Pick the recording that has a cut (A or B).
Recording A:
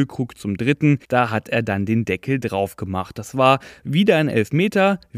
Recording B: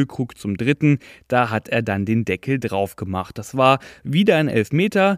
A